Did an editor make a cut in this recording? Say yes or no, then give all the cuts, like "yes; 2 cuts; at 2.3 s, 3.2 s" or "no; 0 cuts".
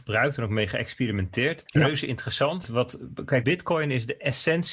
yes; 3 cuts; at 1.7 s, 2.6 s, 3.4 s